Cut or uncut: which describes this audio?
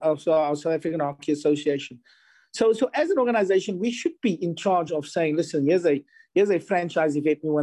uncut